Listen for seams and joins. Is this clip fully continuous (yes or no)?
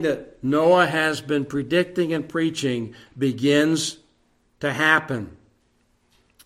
yes